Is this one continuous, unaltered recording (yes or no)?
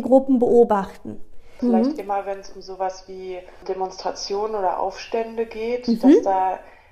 yes